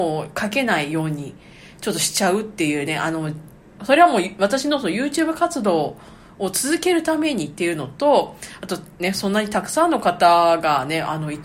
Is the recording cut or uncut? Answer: uncut